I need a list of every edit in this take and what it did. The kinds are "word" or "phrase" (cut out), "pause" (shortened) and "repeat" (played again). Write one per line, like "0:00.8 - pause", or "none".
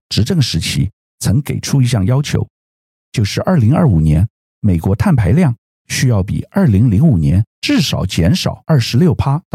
0:07.5 - pause